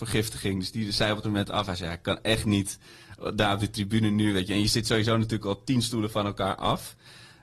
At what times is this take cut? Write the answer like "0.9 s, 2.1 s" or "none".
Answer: 1.2 s